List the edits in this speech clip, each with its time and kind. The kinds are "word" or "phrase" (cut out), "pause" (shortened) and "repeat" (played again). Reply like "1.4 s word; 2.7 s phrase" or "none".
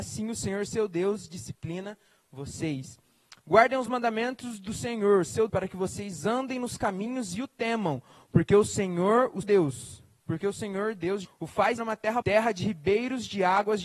5.5 s word; 9.4 s word; 11.2 s word; 11.8 s word; 12.2 s word